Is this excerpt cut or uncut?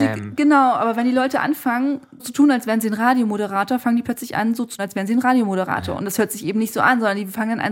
cut